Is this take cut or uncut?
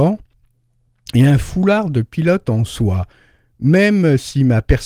uncut